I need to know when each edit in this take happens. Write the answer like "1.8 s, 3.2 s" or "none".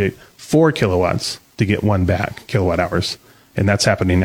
none